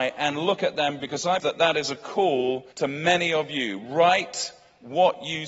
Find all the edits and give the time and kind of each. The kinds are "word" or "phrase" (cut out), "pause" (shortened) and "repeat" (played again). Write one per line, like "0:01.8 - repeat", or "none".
0:01.0 - word
0:01.4 - word
0:02.7 - pause